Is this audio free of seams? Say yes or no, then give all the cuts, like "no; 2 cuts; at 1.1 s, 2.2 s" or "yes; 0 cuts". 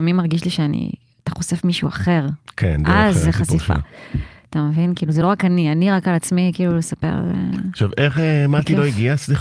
yes; 0 cuts